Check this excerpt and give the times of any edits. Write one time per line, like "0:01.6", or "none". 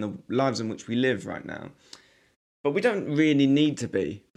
none